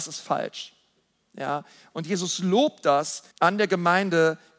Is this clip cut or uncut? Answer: cut